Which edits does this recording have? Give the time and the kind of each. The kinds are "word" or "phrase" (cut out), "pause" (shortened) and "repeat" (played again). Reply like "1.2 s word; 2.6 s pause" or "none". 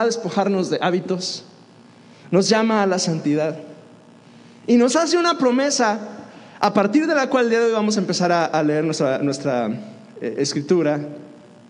none

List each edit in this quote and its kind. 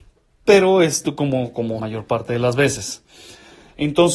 1.8 s phrase

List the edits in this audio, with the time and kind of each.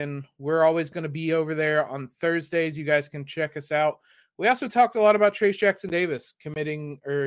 none

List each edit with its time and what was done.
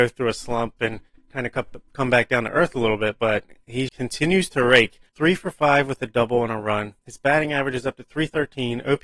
3.9 s word; 5.1 s pause; 7.0 s pause

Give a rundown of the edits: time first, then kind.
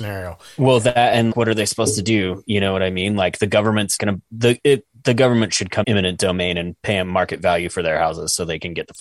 1.3 s word; 4.0 s word; 5.8 s phrase; 6.8 s word

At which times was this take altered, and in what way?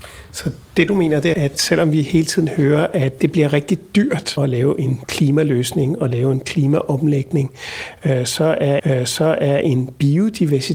1.3 s word; 3.2 s word; 4.4 s phrase; 8.8 s repeat

